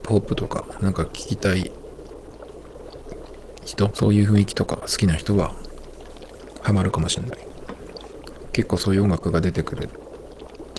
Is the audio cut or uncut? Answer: cut